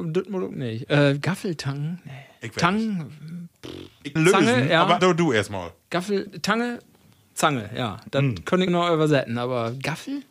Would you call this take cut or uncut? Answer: cut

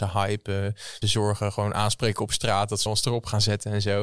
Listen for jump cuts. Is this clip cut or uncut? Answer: cut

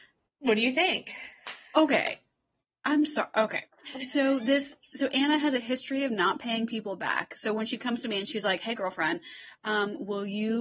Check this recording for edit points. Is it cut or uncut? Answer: uncut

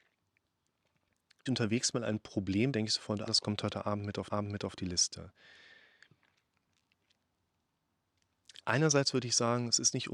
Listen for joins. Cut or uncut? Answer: cut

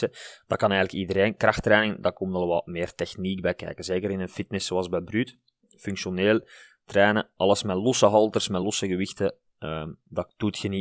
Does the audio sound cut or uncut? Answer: uncut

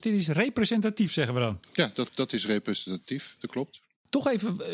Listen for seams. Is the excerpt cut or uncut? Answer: cut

